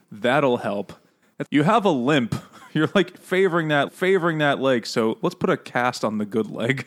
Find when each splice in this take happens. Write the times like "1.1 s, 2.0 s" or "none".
1.4 s, 3.9 s